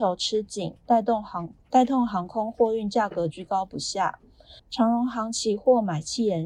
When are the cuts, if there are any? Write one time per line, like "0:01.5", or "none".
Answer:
0:01.6
0:04.6

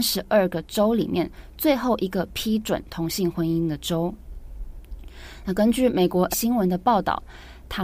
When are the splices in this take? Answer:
0:06.3

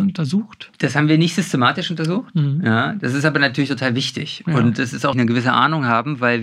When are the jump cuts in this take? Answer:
0:05.1

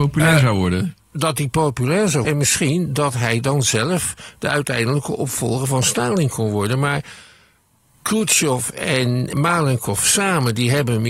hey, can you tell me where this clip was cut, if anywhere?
0:02.2
0:09.3

